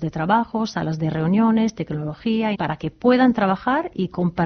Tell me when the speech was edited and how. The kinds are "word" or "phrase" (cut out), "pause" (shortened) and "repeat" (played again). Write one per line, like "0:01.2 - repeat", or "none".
0:02.5 - word